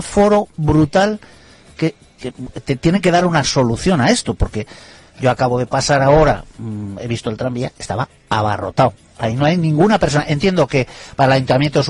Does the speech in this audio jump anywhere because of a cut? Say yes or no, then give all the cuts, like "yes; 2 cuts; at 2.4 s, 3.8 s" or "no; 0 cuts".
no; 0 cuts